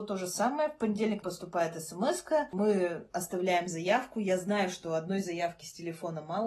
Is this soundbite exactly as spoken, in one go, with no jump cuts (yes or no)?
no